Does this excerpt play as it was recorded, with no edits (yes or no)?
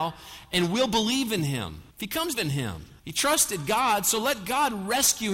no